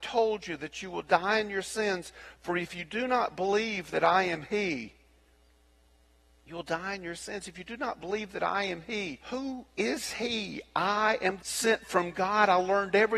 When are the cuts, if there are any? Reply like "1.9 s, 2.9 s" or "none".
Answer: 9.2 s, 11.4 s

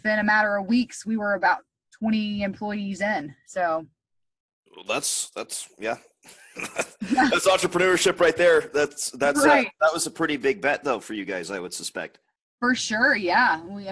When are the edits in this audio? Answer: none

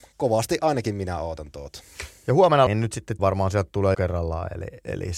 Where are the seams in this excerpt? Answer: 2.7 s, 3.2 s, 3.9 s

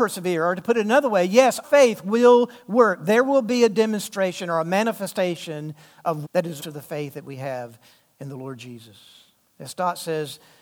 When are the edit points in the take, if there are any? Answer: 1.6 s, 6.2 s, 6.6 s

